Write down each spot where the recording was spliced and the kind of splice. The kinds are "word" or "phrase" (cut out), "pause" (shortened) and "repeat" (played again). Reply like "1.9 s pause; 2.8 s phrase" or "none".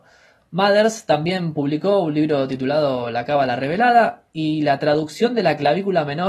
none